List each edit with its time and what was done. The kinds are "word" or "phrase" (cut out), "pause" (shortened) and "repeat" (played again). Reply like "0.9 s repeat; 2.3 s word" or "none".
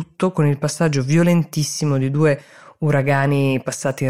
none